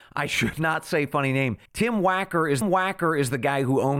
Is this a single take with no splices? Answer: no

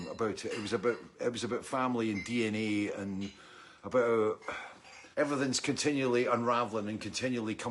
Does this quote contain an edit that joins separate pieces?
yes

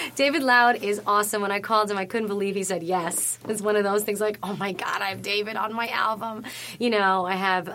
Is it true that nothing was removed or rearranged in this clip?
yes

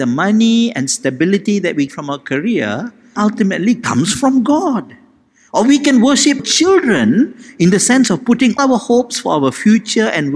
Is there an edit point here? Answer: yes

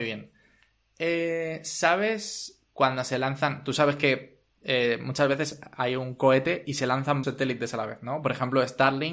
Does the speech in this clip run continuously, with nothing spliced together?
no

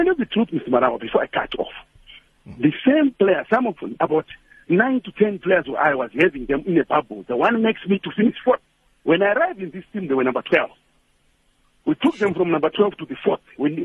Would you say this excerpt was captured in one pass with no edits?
yes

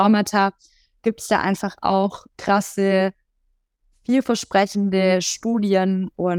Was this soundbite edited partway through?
no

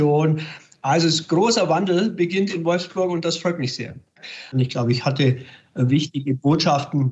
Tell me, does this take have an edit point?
no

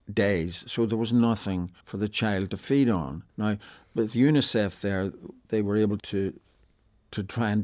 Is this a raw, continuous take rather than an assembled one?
no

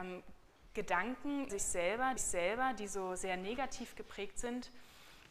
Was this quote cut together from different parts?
yes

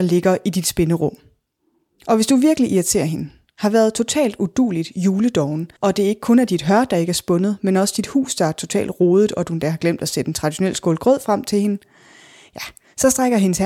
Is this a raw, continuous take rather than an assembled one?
no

